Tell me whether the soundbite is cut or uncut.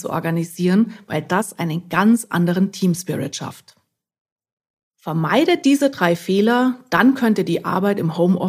uncut